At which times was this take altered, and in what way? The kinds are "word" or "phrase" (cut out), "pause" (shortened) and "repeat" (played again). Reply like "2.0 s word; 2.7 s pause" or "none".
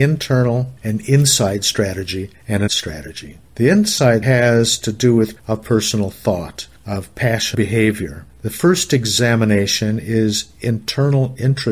2.7 s word; 4.2 s word; 5.4 s word; 7.5 s word